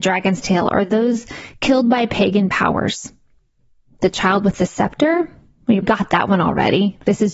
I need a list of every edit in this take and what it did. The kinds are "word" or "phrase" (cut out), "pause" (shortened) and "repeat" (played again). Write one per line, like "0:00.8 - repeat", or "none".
0:05.8 - word